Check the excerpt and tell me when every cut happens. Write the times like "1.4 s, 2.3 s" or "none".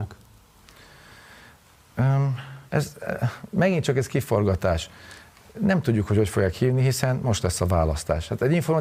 2.7 s